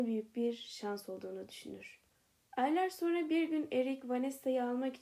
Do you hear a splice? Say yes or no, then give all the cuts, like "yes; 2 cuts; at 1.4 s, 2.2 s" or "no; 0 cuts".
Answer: no; 0 cuts